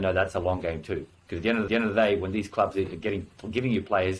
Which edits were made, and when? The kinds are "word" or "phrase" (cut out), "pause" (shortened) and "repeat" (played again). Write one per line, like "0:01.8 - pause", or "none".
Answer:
0:01.7 - repeat